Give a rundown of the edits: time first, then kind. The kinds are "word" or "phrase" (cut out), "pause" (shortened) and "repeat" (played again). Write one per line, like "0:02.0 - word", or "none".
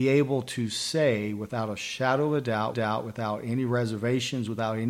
0:02.7 - repeat